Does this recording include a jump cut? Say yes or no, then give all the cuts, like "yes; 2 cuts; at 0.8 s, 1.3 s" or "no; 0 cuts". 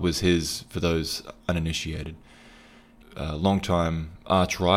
yes; 2 cuts; at 1.4 s, 3.0 s